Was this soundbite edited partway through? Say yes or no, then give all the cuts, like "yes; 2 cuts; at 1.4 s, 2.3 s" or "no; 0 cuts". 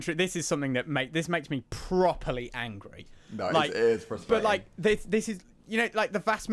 no; 0 cuts